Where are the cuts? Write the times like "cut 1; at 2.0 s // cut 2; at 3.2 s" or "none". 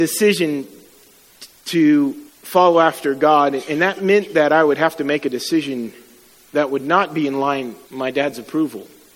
cut 1; at 2.3 s // cut 2; at 7.8 s